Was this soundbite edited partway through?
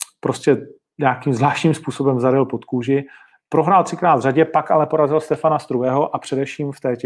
no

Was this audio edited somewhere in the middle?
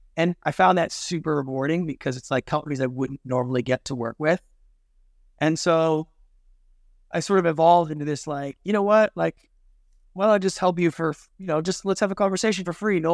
no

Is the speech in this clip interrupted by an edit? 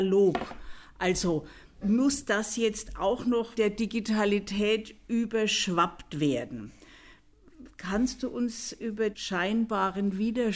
yes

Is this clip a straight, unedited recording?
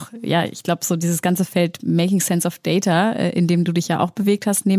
yes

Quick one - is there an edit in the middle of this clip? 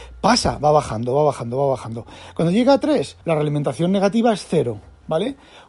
yes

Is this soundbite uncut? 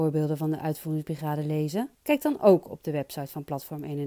no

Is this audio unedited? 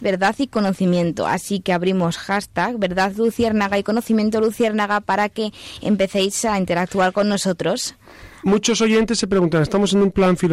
yes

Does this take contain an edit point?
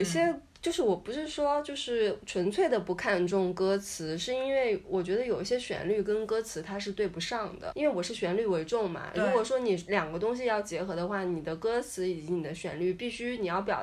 yes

